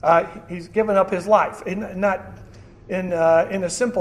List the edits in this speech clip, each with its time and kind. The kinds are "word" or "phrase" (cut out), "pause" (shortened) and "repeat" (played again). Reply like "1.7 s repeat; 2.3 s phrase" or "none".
none